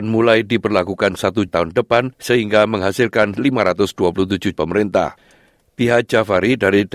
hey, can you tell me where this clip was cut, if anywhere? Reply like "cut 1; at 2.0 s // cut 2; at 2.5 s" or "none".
cut 1; at 1.5 s // cut 2; at 2.1 s // cut 3; at 4.6 s